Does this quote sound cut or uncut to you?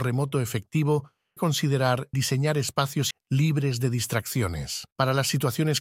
cut